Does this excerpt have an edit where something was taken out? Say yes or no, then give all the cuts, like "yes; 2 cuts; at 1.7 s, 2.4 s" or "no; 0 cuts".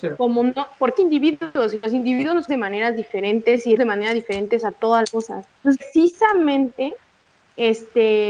yes; 5 cuts; at 1.0 s, 2.5 s, 3.8 s, 5.0 s, 5.8 s